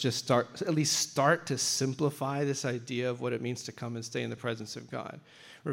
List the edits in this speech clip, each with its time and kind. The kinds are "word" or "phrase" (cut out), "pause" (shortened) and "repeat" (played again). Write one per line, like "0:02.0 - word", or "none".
none